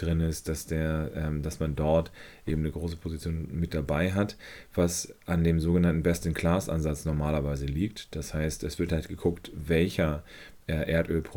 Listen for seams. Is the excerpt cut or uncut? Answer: uncut